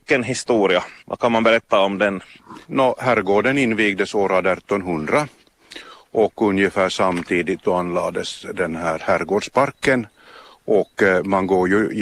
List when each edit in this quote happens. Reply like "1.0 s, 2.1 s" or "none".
1.0 s, 2.6 s, 10.9 s